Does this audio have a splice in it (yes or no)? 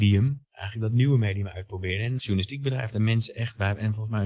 yes